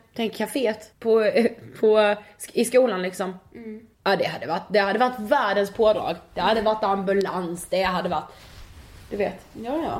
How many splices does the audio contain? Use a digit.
2